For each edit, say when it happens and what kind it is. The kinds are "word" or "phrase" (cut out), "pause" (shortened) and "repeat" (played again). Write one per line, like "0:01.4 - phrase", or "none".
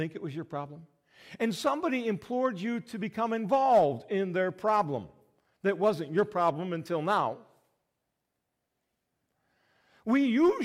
none